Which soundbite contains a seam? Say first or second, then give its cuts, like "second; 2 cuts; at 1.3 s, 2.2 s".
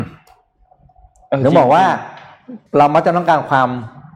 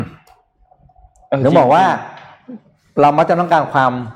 first; 1 cut; at 2.7 s